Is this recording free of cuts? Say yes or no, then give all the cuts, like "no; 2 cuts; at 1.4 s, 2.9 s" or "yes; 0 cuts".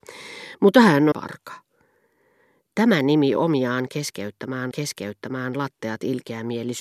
no; 3 cuts; at 1.1 s, 3.4 s, 4.7 s